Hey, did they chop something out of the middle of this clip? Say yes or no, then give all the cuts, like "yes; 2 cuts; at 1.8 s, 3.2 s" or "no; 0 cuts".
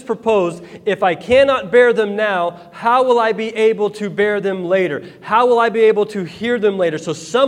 no; 0 cuts